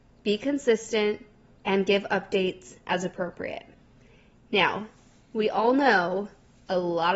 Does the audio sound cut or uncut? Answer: uncut